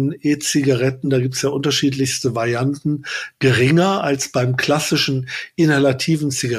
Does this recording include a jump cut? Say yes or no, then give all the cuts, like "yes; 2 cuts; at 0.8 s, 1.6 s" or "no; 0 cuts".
no; 0 cuts